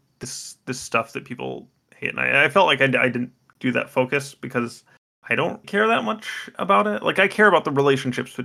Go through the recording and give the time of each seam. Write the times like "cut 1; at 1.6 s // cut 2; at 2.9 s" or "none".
cut 1; at 5.6 s